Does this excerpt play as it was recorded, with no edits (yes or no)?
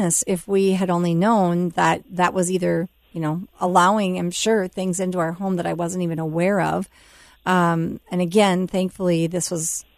yes